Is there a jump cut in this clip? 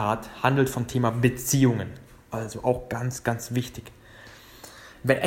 no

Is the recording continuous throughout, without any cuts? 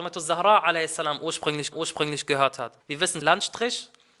no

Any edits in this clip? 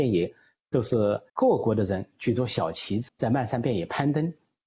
yes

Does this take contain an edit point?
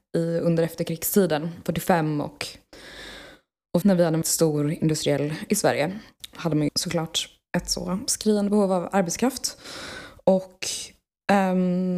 yes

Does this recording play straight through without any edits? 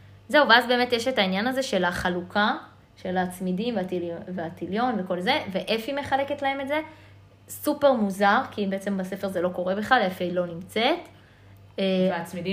yes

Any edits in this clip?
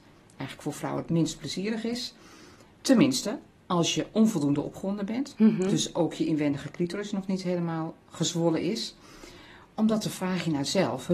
no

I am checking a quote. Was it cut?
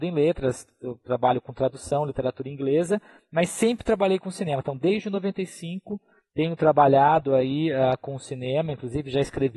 no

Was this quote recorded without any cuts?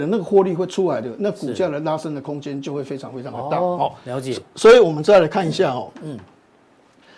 yes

